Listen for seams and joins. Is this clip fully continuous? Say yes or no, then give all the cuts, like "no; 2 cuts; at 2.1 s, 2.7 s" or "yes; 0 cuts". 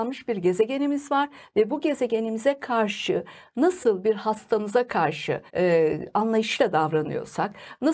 no; 1 cut; at 5.5 s